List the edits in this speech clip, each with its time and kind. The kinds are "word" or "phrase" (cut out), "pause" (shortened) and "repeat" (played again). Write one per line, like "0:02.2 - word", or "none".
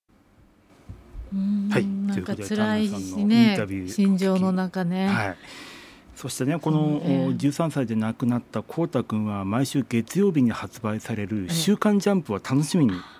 none